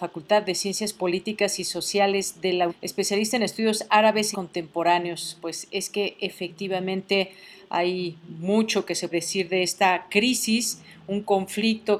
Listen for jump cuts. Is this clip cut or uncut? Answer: cut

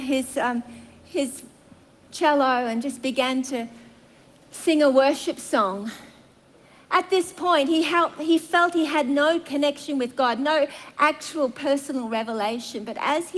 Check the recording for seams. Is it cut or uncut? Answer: uncut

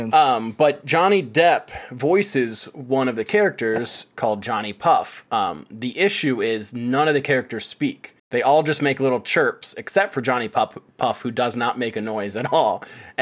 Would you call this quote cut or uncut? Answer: cut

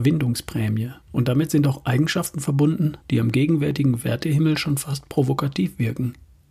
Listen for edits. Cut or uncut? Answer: cut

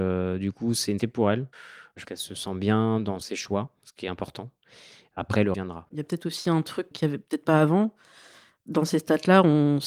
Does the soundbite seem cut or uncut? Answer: cut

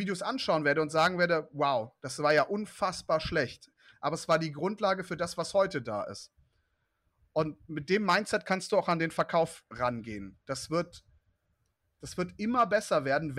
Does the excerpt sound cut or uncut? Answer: uncut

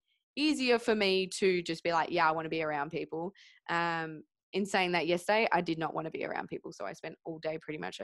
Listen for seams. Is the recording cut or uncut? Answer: uncut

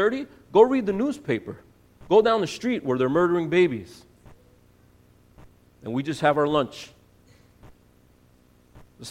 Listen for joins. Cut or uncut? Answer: uncut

